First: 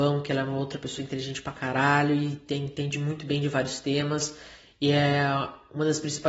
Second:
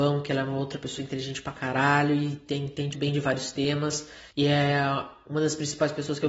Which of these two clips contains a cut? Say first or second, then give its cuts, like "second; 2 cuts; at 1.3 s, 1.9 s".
second; 2 cuts; at 2.9 s, 4.3 s